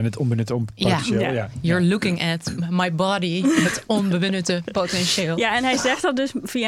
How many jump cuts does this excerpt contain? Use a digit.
0